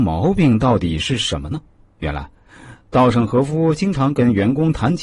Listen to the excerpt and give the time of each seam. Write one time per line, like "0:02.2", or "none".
0:01.7